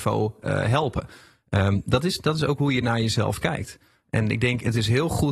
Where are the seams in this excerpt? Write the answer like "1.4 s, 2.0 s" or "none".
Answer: none